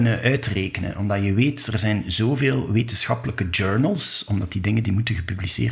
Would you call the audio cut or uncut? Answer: uncut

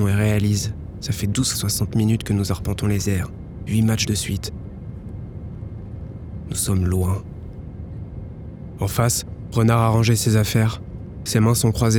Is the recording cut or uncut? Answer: cut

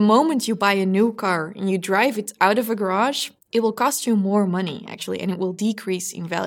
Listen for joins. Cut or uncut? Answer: cut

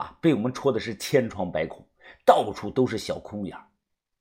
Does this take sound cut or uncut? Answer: uncut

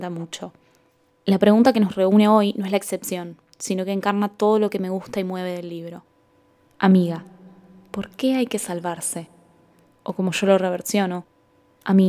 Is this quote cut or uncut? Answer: uncut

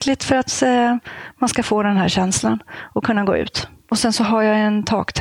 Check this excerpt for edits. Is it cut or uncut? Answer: uncut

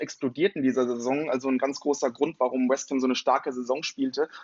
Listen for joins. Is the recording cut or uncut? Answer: uncut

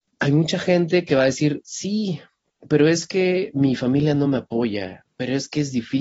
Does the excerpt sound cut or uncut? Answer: uncut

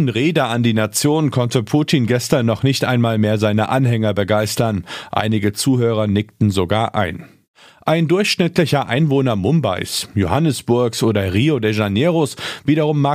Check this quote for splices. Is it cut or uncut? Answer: uncut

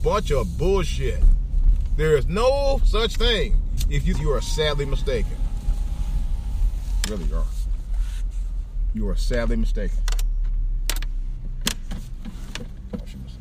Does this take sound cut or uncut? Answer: cut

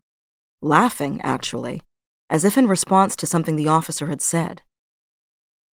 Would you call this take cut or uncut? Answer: uncut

